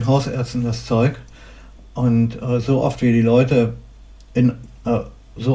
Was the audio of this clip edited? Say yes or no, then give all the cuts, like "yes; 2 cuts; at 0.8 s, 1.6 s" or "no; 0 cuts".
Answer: no; 0 cuts